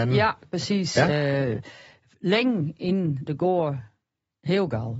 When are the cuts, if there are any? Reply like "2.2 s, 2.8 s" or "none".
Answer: none